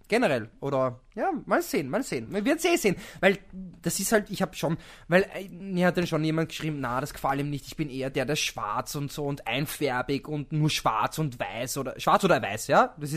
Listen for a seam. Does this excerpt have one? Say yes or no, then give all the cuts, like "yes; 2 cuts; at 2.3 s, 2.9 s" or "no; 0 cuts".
no; 0 cuts